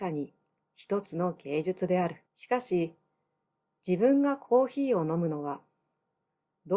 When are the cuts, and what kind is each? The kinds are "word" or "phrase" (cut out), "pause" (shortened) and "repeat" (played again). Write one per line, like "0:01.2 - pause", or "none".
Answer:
0:02.3 - pause